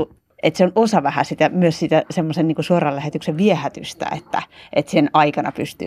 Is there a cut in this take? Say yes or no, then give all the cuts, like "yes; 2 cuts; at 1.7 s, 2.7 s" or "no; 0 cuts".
no; 0 cuts